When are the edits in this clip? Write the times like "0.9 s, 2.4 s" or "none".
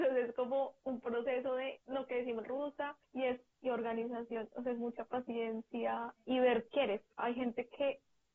1.8 s, 2.4 s, 3.0 s, 3.5 s, 6.7 s, 7.2 s

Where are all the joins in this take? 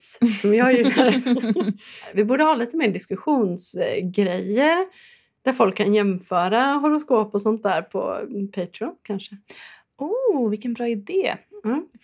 none

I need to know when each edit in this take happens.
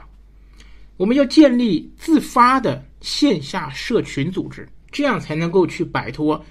2.9 s, 4.8 s

